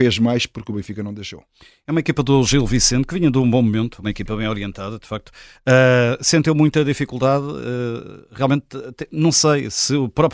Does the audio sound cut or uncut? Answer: uncut